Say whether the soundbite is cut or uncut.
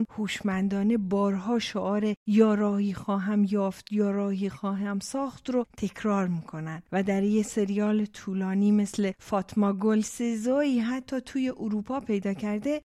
cut